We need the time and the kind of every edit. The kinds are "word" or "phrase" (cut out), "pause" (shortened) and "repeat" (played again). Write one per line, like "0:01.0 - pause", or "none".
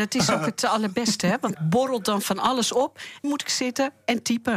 0:01.5 - word
0:03.2 - phrase